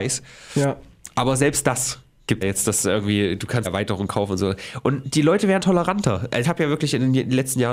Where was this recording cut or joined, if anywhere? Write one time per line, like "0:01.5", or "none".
0:02.4
0:03.6
0:05.6
0:06.4